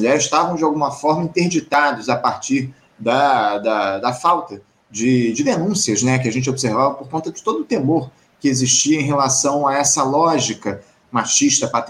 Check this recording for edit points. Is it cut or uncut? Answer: uncut